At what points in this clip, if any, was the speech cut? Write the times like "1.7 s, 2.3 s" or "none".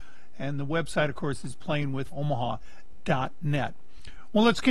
2.1 s